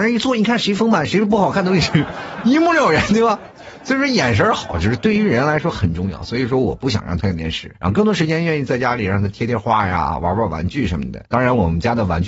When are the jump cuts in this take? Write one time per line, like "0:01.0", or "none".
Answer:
0:07.7
0:11.3